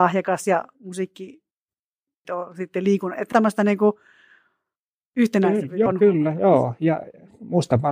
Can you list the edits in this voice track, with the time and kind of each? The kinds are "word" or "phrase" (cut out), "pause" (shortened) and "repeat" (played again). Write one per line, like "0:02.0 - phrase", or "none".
0:02.2 - word
0:03.3 - word
0:05.9 - word

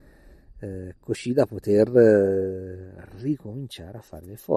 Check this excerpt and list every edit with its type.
none

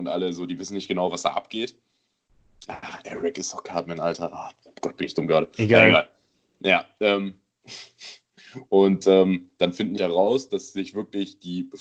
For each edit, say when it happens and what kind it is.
0:10.0 - word

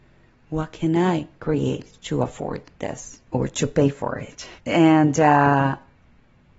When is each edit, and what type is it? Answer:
0:03.3 - pause
0:04.6 - pause

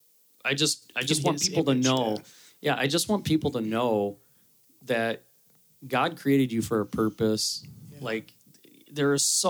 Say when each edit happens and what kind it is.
none

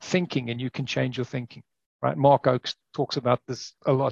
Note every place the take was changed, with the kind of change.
0:01.7 - pause

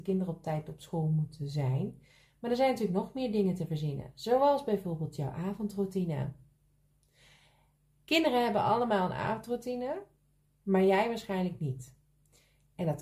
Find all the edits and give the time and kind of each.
none

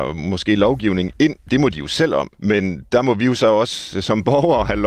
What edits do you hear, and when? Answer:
0:01.5 - phrase
0:02.3 - pause

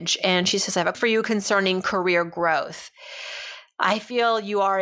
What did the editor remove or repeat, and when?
0:00.9 - word

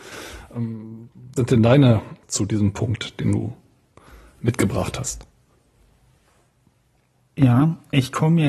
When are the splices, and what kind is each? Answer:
0:01.4 - word
0:02.2 - word

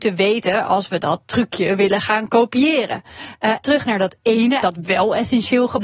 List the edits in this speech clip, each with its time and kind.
0:03.6 - word
0:04.6 - word

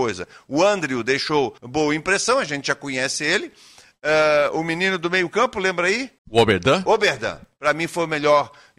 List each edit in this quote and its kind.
0:01.6 - pause
0:06.2 - pause

